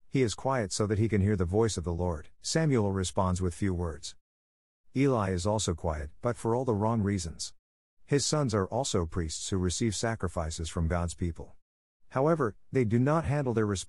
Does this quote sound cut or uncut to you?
cut